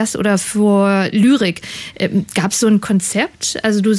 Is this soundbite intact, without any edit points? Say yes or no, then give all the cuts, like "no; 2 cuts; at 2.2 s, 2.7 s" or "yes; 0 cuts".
yes; 0 cuts